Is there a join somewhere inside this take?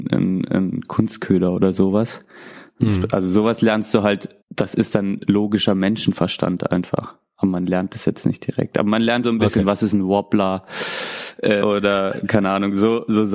yes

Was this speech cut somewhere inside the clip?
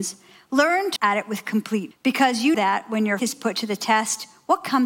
yes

